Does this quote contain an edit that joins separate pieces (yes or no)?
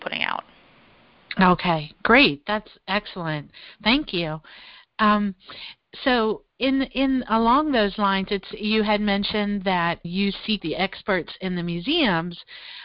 yes